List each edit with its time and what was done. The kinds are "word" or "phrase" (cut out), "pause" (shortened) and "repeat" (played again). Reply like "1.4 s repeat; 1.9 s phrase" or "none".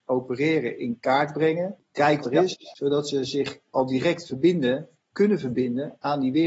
2.2 s word; 5.1 s word

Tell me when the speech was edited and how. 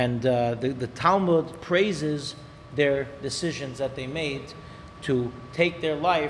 none

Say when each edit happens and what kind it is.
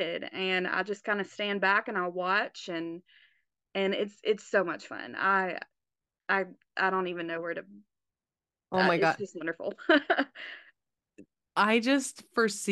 none

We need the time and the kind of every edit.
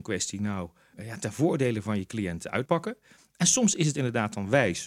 0.9 s word; 2.7 s word

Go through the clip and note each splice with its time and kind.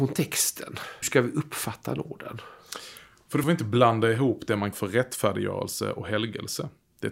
1.0 s word; 3.4 s phrase; 4.7 s word

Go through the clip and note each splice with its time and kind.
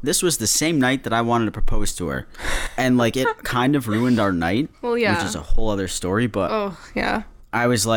none

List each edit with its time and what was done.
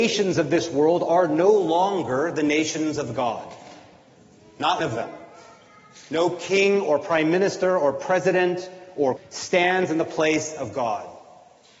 4.8 s word; 9.2 s word

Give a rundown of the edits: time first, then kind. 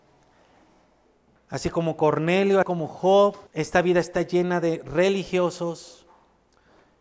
2.6 s word; 3.5 s pause

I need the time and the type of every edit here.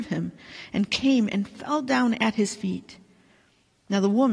none

